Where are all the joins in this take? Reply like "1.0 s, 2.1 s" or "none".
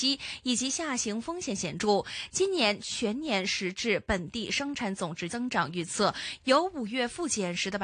5.3 s